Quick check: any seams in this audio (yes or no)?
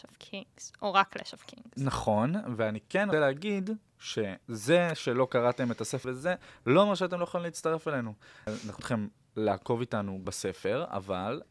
yes